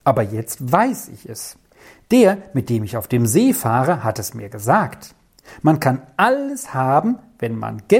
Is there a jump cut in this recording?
no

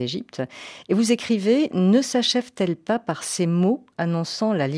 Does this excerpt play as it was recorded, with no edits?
yes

